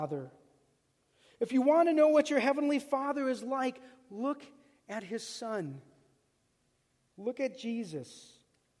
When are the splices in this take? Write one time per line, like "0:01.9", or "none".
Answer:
none